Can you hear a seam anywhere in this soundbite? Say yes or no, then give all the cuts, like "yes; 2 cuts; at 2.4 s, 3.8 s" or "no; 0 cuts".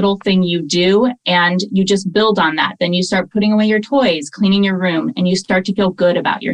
no; 0 cuts